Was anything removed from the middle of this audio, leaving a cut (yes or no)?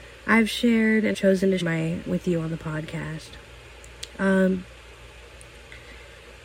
yes